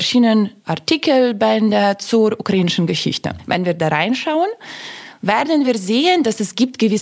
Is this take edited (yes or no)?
no